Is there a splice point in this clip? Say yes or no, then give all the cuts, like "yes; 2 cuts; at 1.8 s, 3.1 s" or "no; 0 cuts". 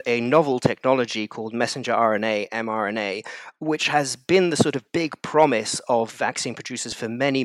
no; 0 cuts